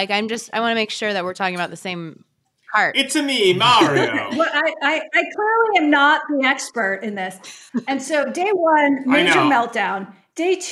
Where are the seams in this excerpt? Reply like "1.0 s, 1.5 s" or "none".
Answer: none